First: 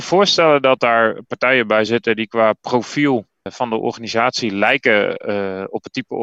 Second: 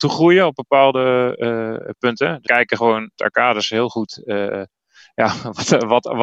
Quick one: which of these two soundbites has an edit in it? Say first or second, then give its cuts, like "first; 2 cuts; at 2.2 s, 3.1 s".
second; 2 cuts; at 2.5 s, 3.2 s